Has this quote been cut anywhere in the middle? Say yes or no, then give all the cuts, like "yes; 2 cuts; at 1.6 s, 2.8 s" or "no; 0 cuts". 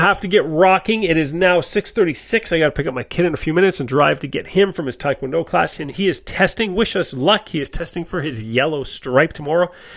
no; 0 cuts